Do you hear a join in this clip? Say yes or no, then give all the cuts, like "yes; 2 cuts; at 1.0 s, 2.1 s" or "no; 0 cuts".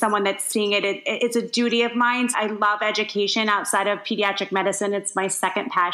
yes; 2 cuts; at 1.2 s, 2.3 s